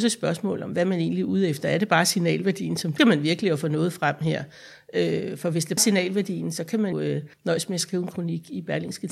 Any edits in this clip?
yes; 4 cuts; at 3.0 s, 5.8 s, 6.9 s, 7.3 s

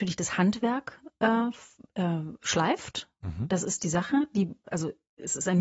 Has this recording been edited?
no; 0 cuts

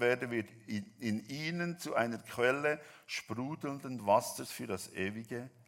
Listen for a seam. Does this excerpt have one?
no; 0 cuts

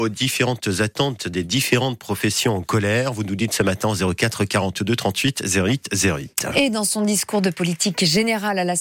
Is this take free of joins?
yes; 0 cuts

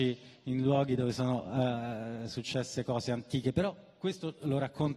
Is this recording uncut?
yes; 0 cuts

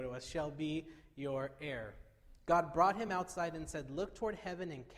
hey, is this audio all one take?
yes; 0 cuts

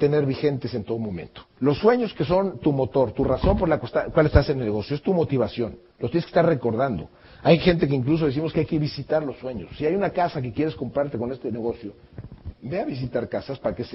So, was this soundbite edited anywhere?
yes; 2 cuts; at 1.5 s, 5.9 s

